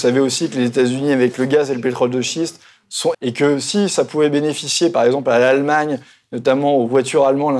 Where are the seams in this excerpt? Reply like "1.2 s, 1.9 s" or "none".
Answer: 3.1 s